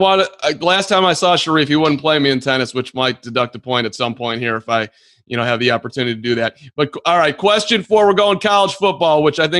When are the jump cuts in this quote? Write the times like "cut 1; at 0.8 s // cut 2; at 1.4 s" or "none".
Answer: none